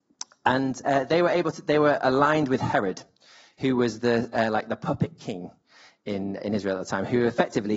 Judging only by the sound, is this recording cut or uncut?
cut